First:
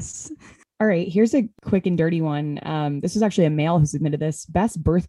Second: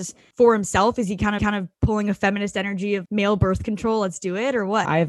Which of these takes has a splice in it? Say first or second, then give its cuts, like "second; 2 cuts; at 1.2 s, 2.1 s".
second; 2 cuts; at 1.4 s, 3.0 s